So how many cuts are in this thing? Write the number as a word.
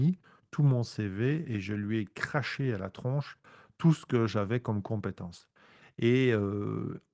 zero